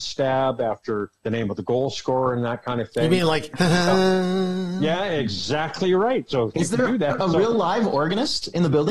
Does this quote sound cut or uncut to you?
cut